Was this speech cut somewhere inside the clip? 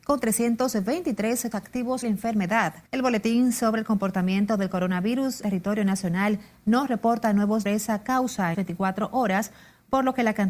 yes; 6 cuts; at 1.5 s, 2.0 s, 2.9 s, 5.4 s, 7.7 s, 8.5 s

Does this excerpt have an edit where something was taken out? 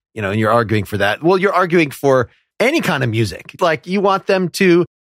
yes; 1 cut; at 3.6 s

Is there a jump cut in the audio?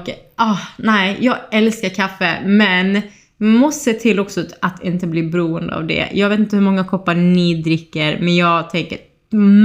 no; 0 cuts

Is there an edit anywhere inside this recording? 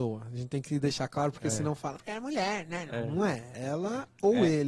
yes; 1 cut; at 2.0 s

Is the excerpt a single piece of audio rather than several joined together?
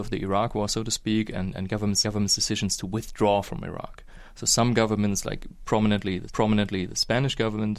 no; 2 cuts; at 2.0 s, 6.3 s

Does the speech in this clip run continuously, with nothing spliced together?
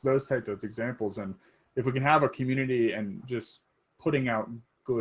no; 1 cut; at 3.2 s

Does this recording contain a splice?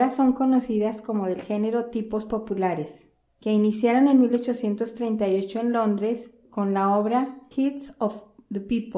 yes; 2 cuts; at 3.3 s, 7.5 s

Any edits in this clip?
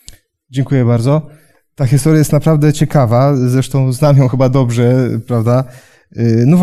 no; 0 cuts

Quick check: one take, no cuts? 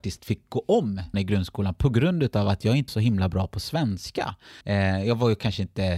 no; 3 cuts; at 1.1 s, 2.9 s, 4.6 s

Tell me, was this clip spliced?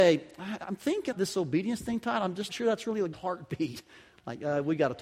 yes; 3 cuts; at 1.1 s, 2.5 s, 3.1 s

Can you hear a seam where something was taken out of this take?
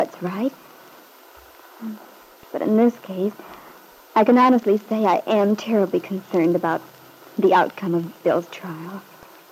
no; 0 cuts

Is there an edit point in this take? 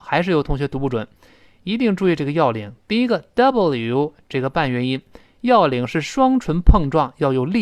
no; 0 cuts

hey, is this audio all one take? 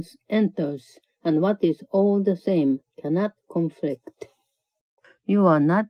yes; 0 cuts

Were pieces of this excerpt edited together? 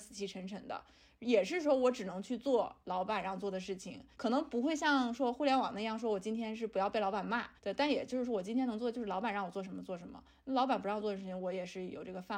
yes; 2 cuts; at 4.1 s, 7.6 s

